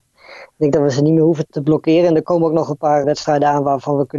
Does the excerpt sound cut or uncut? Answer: cut